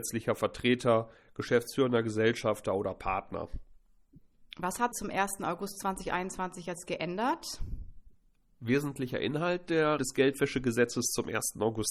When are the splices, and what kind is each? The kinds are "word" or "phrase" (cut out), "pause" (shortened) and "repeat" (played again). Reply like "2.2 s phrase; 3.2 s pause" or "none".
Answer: 4.9 s word; 10.0 s word